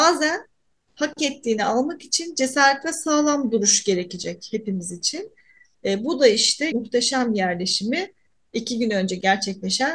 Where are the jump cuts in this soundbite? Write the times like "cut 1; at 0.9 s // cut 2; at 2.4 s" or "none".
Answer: cut 1; at 6.7 s